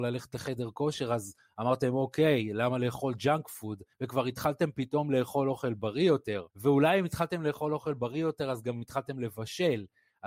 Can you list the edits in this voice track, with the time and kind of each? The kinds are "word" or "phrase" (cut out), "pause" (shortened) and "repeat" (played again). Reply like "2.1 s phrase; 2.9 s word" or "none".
3.9 s pause; 6.5 s pause

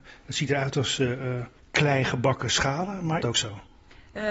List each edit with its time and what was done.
3.2 s phrase

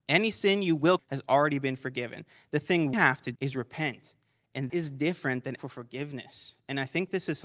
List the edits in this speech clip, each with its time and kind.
1.0 s word; 2.9 s word; 3.4 s word; 4.7 s word; 5.6 s word

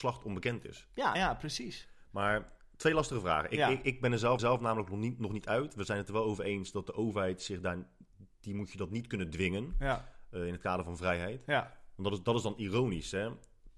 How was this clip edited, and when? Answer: 1.1 s word; 4.4 s repeat; 8.3 s pause

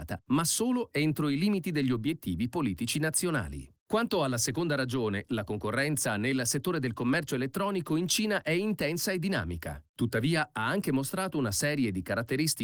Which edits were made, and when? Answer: none

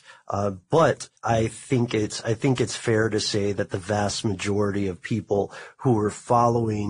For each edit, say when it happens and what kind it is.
1.2 s pause

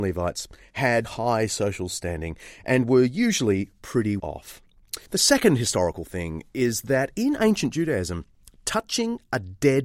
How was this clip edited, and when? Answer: 1.0 s word; 4.2 s word; 5.1 s pause

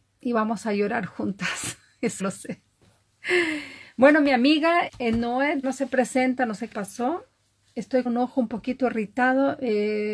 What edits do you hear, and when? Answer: 2.2 s word; 4.9 s word; 5.6 s word; 6.7 s word; 8.1 s word

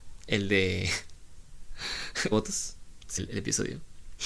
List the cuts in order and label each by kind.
2.3 s phrase; 3.2 s word

